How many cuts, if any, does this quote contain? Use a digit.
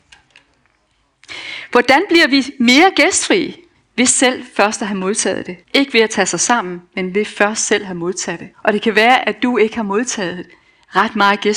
3